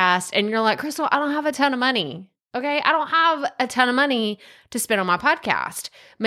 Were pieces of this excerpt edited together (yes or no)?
no